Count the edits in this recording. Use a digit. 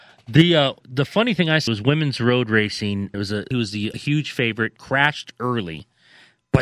5